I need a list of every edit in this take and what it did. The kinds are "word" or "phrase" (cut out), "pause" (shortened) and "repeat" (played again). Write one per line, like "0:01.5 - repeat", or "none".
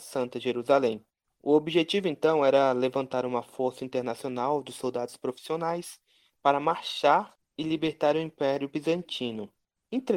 none